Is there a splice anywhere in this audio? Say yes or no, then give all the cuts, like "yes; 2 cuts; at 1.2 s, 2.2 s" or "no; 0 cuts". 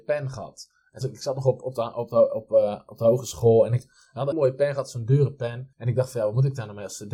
yes; 3 cuts; at 1.0 s, 4.3 s, 5.7 s